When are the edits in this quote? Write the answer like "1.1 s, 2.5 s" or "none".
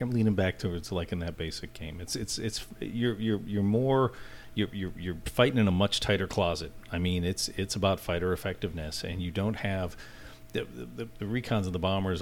11.2 s